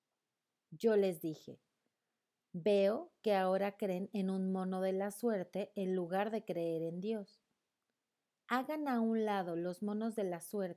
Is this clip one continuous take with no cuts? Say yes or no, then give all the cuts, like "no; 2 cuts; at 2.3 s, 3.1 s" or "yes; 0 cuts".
yes; 0 cuts